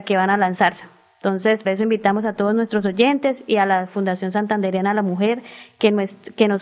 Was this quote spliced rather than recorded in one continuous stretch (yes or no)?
yes